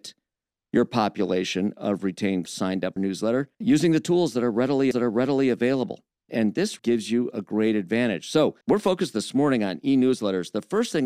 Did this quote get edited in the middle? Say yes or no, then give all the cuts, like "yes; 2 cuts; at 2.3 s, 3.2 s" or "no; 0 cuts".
yes; 6 cuts; at 2.5 s, 3.0 s, 3.5 s, 4.9 s, 6.8 s, 8.6 s